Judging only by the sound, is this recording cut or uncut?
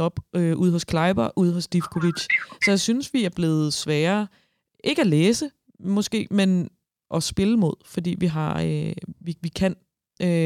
uncut